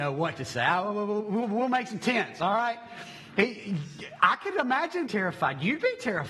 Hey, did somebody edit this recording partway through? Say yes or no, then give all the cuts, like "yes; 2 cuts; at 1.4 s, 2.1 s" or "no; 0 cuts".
yes; 1 cut; at 5.1 s